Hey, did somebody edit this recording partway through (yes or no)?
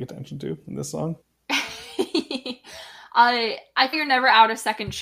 yes